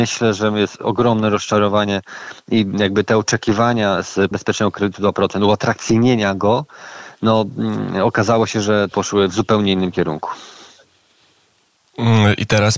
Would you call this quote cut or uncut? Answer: cut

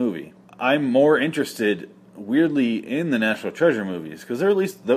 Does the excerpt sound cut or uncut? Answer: uncut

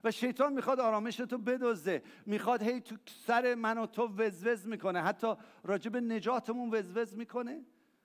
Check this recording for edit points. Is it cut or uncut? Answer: uncut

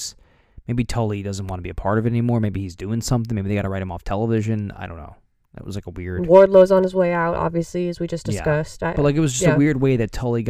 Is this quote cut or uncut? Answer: uncut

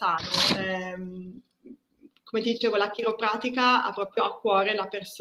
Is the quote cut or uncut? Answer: uncut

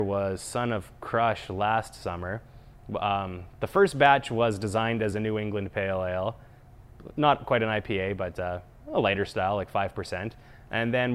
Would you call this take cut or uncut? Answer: uncut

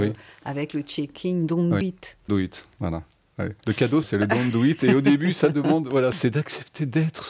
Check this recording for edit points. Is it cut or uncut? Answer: cut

